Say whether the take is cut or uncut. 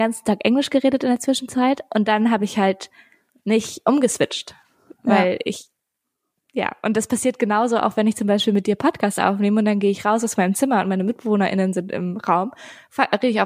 uncut